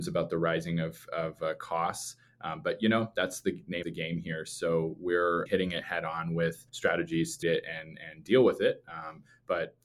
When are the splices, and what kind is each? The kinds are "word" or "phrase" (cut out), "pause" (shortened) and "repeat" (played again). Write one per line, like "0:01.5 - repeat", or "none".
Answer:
0:03.8 - word
0:05.5 - phrase
0:06.7 - pause
0:07.4 - word